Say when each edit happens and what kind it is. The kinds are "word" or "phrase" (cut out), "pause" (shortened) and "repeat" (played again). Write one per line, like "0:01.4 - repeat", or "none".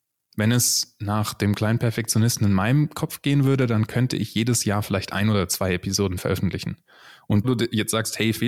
0:07.4 - word